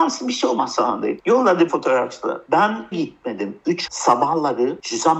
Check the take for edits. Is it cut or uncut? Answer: cut